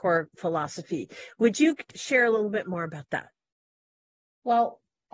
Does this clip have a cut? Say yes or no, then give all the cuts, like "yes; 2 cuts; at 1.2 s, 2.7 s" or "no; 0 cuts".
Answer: yes; 1 cut; at 1.9 s